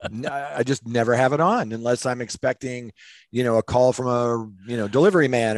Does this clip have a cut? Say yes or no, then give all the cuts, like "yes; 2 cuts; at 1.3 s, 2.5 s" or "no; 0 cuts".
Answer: no; 0 cuts